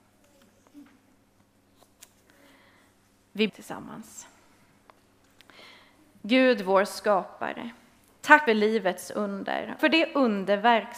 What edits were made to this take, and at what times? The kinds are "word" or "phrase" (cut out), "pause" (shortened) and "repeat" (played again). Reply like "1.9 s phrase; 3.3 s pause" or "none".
3.5 s word; 8.5 s word; 9.8 s word